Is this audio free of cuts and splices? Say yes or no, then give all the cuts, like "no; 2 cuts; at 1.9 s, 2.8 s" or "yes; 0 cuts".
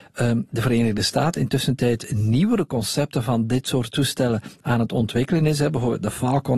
yes; 0 cuts